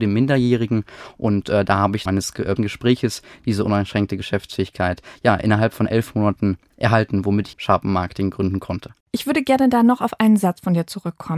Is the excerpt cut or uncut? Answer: cut